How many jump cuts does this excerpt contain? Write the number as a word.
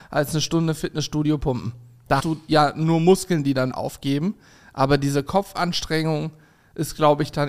two